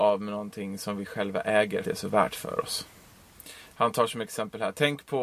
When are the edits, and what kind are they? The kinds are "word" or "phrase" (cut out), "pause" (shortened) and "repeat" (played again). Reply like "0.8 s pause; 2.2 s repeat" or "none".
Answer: 1.8 s phrase